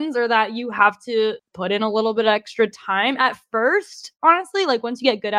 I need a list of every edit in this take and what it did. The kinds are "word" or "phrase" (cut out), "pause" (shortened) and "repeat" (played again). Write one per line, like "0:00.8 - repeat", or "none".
none